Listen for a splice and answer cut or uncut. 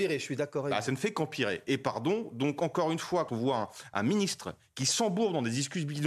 cut